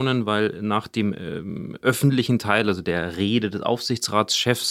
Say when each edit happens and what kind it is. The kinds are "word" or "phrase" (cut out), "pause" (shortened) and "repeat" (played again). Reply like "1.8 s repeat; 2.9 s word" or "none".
none